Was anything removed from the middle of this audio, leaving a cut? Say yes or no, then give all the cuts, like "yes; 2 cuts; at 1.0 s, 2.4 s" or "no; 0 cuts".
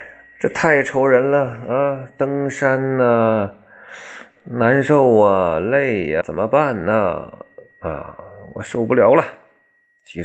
yes; 1 cut; at 6.2 s